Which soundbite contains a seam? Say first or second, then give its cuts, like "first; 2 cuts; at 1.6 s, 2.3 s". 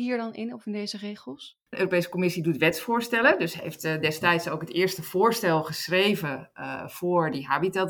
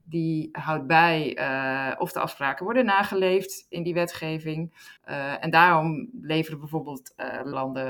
second; 1 cut; at 5.0 s